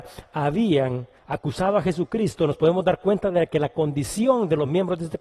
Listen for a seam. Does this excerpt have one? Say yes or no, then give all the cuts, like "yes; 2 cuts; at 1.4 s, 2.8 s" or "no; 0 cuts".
no; 0 cuts